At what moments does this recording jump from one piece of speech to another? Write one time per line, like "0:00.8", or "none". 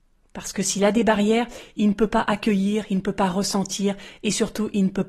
none